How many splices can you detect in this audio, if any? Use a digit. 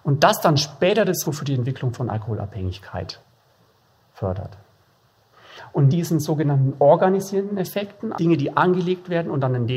3